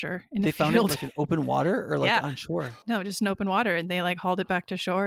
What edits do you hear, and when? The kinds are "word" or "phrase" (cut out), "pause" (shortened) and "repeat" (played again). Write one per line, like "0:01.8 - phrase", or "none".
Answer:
0:02.8 - pause